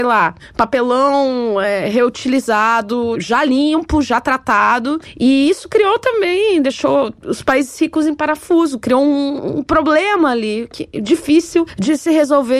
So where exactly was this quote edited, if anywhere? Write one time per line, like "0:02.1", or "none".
none